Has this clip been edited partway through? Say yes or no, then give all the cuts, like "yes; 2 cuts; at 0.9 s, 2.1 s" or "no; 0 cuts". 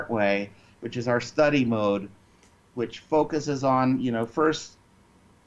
no; 0 cuts